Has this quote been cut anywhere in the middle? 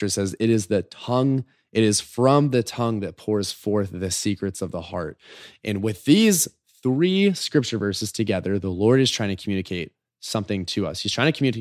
no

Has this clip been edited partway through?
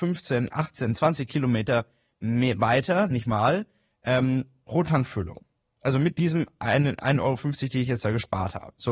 no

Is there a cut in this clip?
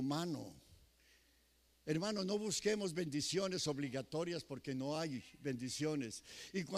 no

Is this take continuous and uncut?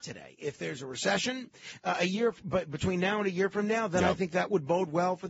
yes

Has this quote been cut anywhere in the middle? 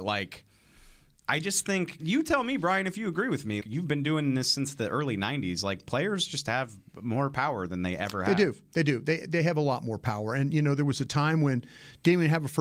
yes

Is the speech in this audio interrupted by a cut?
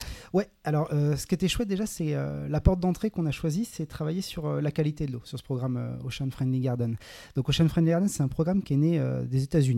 no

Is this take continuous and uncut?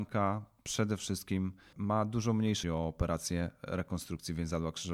no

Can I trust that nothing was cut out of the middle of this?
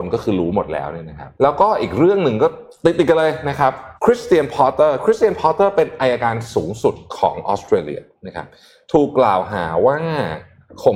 no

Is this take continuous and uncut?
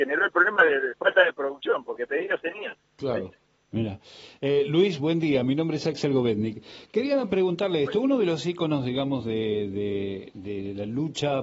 yes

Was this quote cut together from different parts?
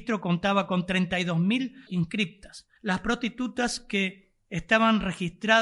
yes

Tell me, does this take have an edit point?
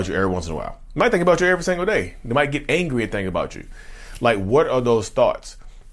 no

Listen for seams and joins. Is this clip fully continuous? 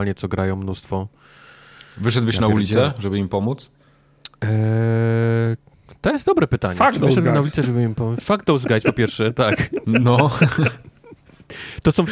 yes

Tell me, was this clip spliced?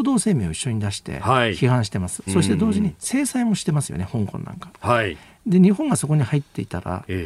yes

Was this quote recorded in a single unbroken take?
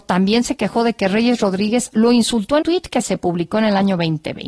no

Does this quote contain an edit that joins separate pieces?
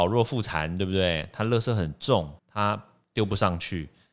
yes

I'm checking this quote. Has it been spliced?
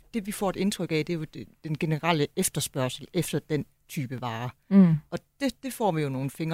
no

